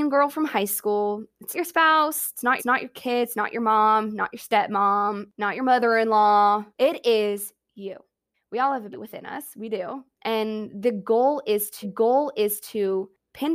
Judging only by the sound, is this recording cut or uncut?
cut